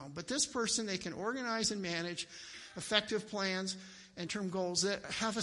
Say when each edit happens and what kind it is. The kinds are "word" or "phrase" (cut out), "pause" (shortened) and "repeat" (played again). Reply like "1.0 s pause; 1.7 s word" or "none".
4.3 s word